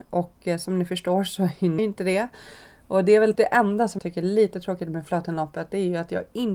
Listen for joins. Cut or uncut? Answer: cut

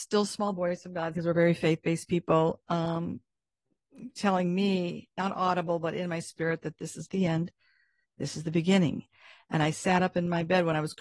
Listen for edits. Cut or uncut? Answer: cut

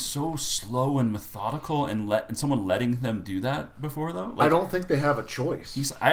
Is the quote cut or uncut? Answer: uncut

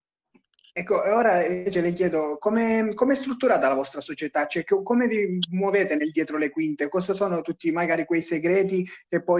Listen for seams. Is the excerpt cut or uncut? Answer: uncut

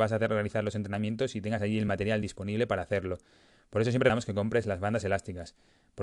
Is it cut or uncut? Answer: uncut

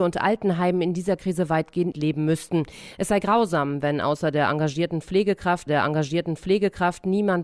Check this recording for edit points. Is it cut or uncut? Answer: cut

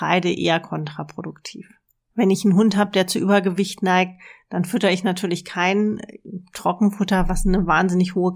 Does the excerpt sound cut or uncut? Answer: uncut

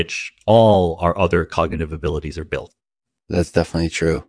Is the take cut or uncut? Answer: uncut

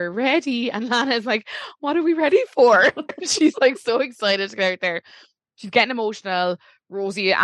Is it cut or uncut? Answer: uncut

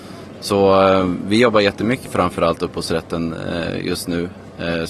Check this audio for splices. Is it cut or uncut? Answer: cut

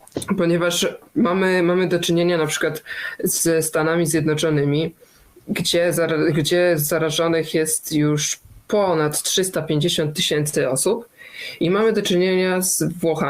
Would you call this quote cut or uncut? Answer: uncut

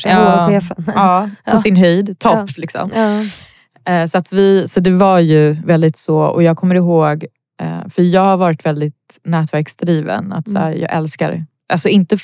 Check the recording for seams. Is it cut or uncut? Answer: uncut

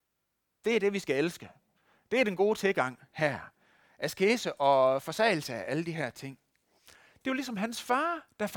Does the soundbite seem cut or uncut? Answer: uncut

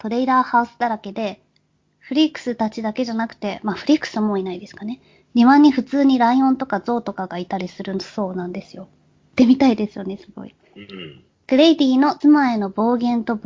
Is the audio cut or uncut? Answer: uncut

